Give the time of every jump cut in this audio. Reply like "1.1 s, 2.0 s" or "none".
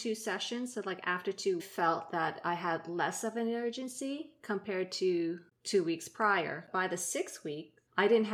1.6 s